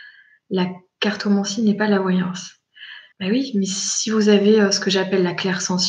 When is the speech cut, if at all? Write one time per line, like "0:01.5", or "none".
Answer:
0:03.1